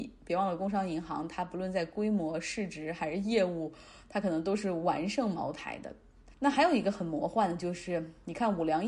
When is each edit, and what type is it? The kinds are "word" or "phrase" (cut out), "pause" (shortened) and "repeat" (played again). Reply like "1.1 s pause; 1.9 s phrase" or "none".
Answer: 6.3 s pause

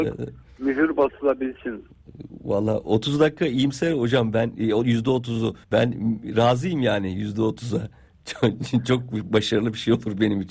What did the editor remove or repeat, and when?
5.6 s pause

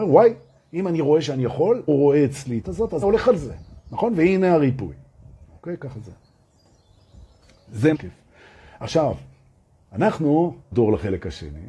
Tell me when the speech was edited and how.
1.9 s word; 2.6 s word; 3.0 s word; 7.9 s word; 10.7 s word

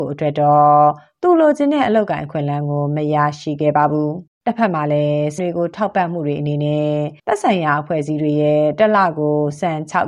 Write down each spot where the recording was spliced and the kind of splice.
4.3 s pause; 5.4 s word; 7.2 s pause

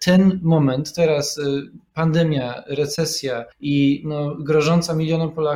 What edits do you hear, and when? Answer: 3.5 s pause

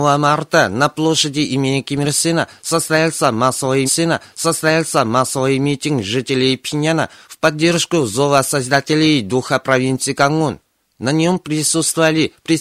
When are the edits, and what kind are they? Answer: 3.9 s repeat

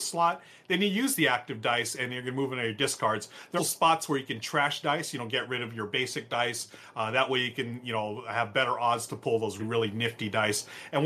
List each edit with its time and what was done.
3.6 s word; 9.6 s word

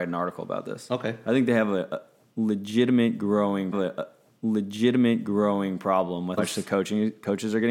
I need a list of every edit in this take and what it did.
3.7 s repeat; 6.4 s phrase

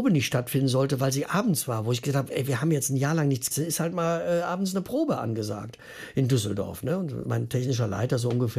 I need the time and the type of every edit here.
3.5 s phrase

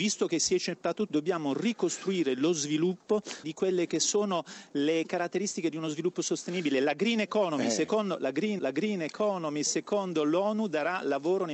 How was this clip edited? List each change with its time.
1.1 s word; 3.4 s phrase; 8.6 s repeat

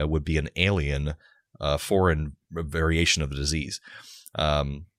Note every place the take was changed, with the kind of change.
none

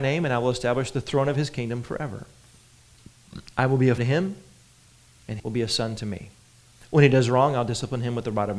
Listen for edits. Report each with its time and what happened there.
4.0 s word; 5.4 s word

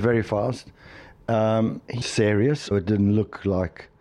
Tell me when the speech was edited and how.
2.0 s word; 2.7 s word

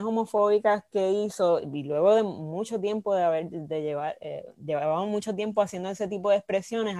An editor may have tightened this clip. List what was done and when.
none

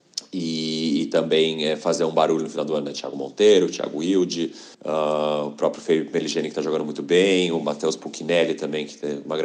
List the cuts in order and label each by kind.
4.7 s pause

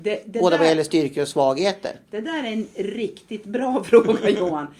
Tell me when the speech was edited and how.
none

